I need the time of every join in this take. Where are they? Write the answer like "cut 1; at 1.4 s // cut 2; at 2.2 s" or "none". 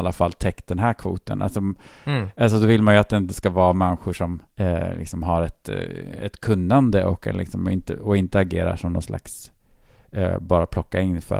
cut 1; at 4.5 s